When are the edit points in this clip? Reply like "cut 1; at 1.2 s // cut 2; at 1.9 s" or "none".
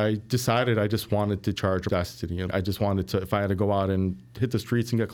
cut 1; at 1.5 s // cut 2; at 1.9 s // cut 3; at 2.5 s